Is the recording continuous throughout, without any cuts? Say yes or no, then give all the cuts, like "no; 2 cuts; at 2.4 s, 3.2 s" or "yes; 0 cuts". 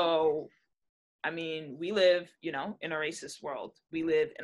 yes; 0 cuts